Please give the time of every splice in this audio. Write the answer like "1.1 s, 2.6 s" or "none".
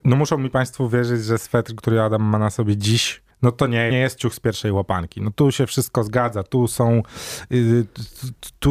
3.3 s, 3.9 s